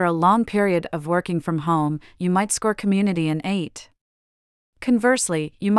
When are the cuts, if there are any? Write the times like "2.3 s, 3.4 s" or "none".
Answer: none